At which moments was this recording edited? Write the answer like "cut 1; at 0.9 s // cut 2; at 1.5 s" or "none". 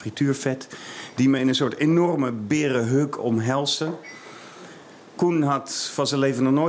none